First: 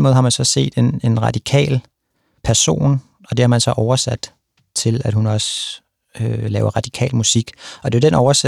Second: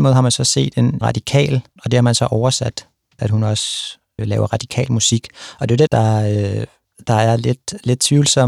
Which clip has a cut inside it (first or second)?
second